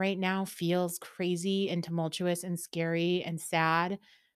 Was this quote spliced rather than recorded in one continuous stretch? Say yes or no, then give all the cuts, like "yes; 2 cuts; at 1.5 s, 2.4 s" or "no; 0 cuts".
no; 0 cuts